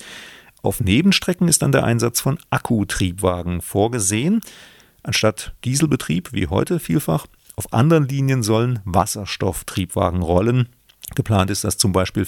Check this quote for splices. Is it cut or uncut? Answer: uncut